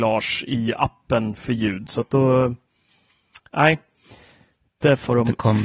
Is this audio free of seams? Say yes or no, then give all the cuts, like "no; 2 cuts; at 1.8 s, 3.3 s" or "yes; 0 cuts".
yes; 0 cuts